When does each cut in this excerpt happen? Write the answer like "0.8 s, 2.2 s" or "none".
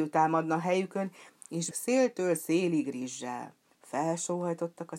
1.7 s, 3.6 s